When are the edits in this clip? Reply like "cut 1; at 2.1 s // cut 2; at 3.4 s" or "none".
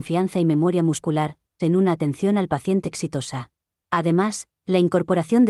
cut 1; at 1.6 s // cut 2; at 2.8 s // cut 3; at 3.7 s